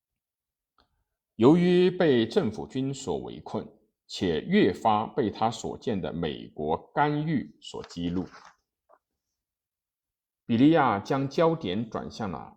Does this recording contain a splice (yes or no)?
no